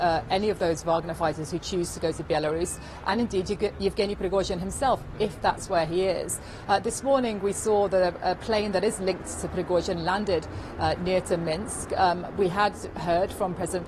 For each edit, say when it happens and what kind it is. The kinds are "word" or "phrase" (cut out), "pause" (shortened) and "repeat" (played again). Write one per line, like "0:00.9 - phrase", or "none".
none